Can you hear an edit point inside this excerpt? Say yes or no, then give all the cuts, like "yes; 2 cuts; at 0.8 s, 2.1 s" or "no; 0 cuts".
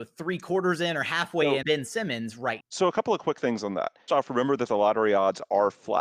yes; 3 cuts; at 1.6 s, 2.6 s, 4.1 s